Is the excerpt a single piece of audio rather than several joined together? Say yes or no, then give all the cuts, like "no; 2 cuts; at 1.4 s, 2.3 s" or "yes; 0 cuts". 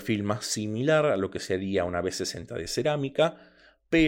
yes; 0 cuts